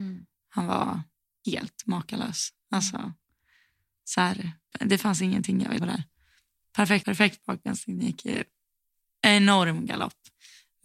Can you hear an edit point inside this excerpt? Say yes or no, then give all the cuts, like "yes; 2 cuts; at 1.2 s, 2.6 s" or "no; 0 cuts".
yes; 4 cuts; at 1.4 s, 4.7 s, 5.8 s, 7.0 s